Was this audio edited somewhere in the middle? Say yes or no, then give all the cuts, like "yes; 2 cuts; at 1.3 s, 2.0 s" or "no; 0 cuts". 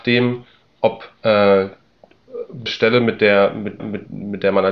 yes; 2 cuts; at 2.7 s, 3.8 s